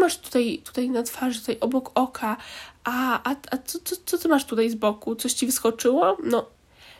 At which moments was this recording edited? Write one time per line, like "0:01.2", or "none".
none

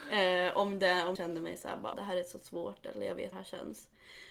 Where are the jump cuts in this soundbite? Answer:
0:01.2
0:01.9
0:03.3

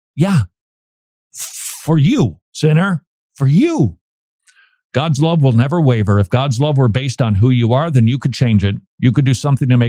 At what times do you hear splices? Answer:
0:02.4

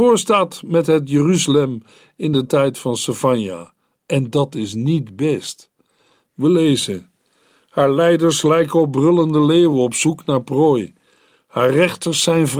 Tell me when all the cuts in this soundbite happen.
none

